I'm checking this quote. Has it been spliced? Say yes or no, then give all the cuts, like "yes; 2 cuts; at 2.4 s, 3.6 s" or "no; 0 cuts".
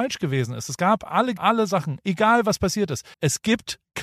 yes; 2 cuts; at 1.4 s, 3.1 s